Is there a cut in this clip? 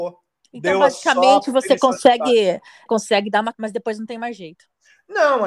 yes; 2 cuts; at 2.9 s, 3.5 s

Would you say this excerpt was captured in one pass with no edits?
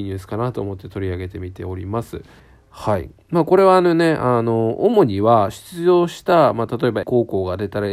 no; 2 cuts; at 2.4 s, 7.0 s

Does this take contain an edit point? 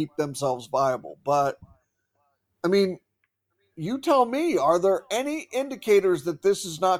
no; 0 cuts

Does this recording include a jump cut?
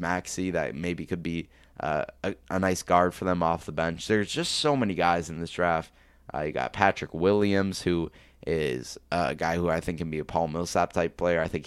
no; 0 cuts

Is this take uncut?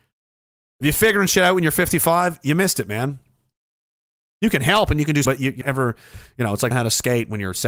no; 3 cuts; at 5.2 s, 5.6 s, 6.7 s

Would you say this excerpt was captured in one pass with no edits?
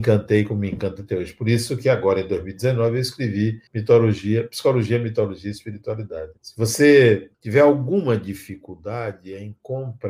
no; 3 cuts; at 3.7 s, 6.4 s, 7.3 s

